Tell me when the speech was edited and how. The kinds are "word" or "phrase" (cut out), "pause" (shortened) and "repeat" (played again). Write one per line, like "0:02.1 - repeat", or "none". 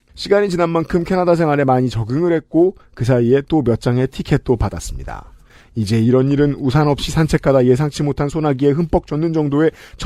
none